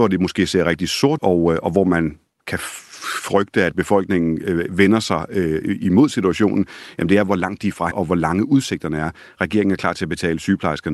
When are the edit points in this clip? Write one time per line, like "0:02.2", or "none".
0:01.2
0:07.9